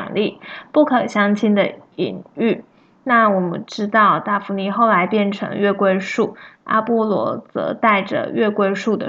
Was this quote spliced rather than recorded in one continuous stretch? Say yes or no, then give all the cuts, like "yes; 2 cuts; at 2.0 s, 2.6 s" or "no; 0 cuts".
no; 0 cuts